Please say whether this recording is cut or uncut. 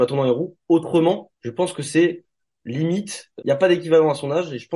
cut